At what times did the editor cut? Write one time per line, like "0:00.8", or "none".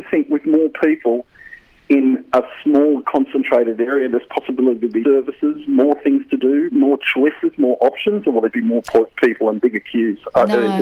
0:05.0
0:08.5